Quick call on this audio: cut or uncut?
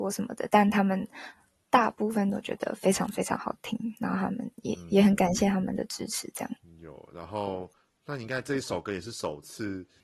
uncut